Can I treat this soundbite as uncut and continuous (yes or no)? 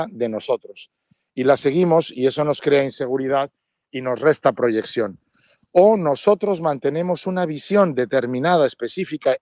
yes